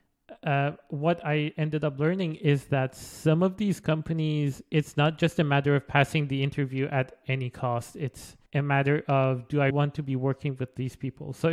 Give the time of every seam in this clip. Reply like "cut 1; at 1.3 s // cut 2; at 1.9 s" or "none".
cut 1; at 8.5 s // cut 2; at 9.7 s